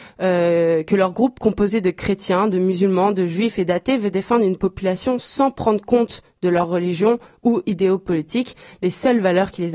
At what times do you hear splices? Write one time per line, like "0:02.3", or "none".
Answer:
none